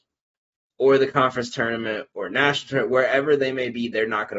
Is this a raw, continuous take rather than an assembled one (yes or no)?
yes